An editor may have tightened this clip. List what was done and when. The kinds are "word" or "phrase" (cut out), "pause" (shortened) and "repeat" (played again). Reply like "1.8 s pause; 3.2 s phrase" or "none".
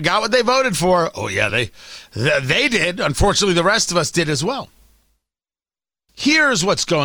none